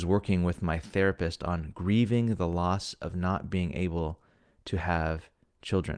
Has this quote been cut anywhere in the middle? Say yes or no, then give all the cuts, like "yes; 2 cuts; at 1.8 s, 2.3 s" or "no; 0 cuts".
no; 0 cuts